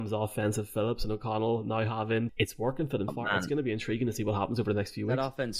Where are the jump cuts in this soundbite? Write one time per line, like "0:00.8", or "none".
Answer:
0:02.3
0:03.1